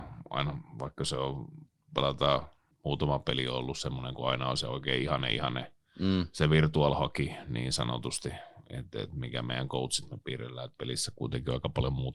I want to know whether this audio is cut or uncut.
cut